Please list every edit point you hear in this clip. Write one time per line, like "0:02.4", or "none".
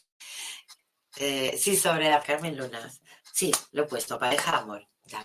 0:02.2